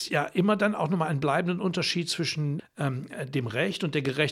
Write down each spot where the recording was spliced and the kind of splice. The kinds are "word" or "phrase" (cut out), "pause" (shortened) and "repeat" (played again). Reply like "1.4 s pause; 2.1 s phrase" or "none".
2.6 s word